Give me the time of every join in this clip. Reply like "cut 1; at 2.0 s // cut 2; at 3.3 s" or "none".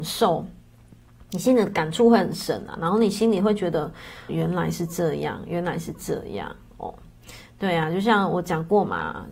cut 1; at 4.3 s

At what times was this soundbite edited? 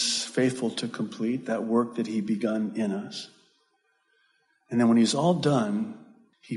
none

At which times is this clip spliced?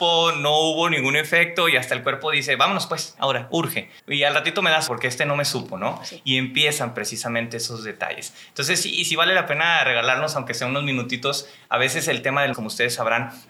cut 1; at 3.2 s // cut 2; at 4.0 s // cut 3; at 4.9 s // cut 4; at 12.5 s

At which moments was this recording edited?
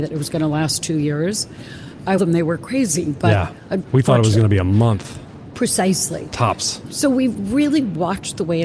cut 1; at 2.2 s

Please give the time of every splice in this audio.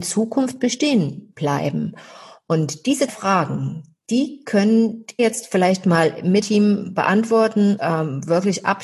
cut 1; at 3.1 s // cut 2; at 5.2 s // cut 3; at 6.4 s // cut 4; at 7.8 s

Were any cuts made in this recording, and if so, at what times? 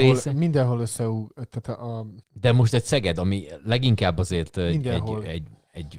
cut 1; at 2.2 s

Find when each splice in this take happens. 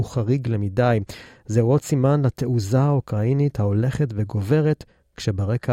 none

